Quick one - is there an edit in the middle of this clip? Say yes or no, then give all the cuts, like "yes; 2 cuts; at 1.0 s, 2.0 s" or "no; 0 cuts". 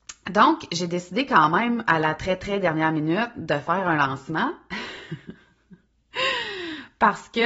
no; 0 cuts